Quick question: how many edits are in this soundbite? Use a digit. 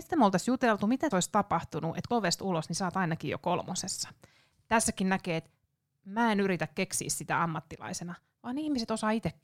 2